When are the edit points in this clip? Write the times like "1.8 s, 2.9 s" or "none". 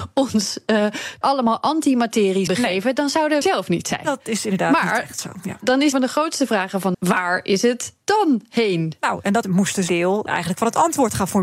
1.2 s, 2.5 s, 3.4 s, 5.9 s, 6.9 s, 9.4 s, 9.9 s, 10.3 s